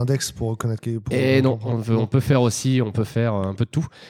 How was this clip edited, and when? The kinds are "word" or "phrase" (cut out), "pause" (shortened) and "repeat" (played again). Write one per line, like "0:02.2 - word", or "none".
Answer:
none